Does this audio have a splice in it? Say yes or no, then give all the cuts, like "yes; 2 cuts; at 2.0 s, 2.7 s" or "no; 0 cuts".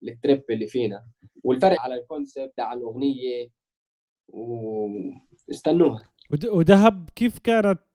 yes; 2 cuts; at 1.8 s, 2.6 s